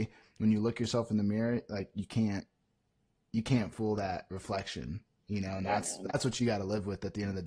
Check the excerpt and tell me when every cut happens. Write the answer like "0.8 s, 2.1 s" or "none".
none